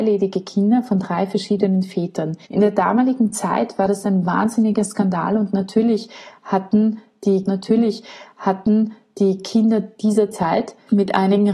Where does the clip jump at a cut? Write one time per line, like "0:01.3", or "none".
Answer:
0:02.4
0:07.4